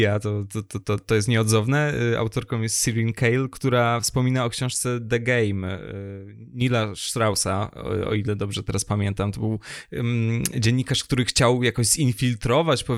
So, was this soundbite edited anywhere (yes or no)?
no